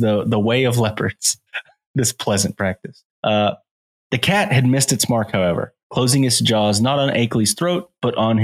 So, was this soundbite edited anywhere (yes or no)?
yes